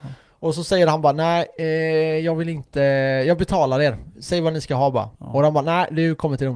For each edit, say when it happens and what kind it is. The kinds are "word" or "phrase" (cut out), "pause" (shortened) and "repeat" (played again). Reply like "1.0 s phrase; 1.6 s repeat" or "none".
5.1 s pause

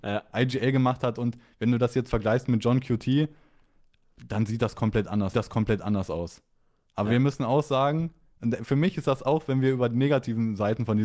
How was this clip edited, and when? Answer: 5.3 s repeat

